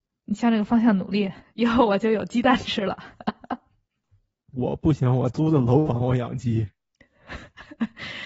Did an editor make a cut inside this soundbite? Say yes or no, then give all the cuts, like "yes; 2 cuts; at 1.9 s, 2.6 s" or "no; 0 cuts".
no; 0 cuts